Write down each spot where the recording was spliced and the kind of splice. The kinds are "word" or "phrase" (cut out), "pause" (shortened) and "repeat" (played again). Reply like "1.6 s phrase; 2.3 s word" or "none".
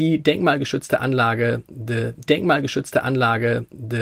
2.3 s repeat